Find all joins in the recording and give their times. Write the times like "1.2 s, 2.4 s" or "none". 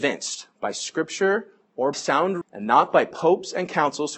1.9 s, 2.4 s